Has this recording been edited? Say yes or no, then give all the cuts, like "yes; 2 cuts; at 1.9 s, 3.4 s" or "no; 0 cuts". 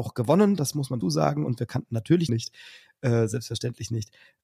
yes; 2 cuts; at 1.0 s, 2.3 s